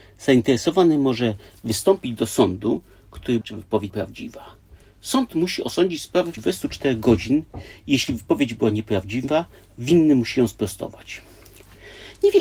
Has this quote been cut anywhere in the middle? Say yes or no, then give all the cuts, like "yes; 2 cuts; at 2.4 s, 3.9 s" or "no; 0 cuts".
yes; 3 cuts; at 3.4 s, 3.9 s, 6.4 s